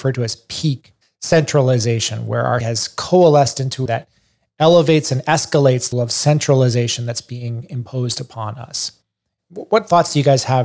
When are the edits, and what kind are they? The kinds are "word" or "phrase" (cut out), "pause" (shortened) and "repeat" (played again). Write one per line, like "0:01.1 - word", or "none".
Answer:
0:01.0 - pause
0:02.6 - word
0:03.9 - phrase
0:05.9 - word

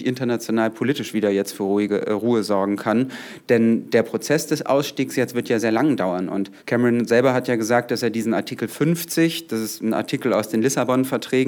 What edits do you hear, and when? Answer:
0:05.6 - word
0:06.6 - pause

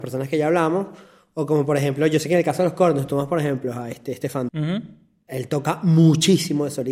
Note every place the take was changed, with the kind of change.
0:04.5 - word

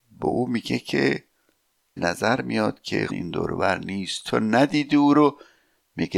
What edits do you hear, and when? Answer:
0:02.0 - word
0:03.1 - phrase

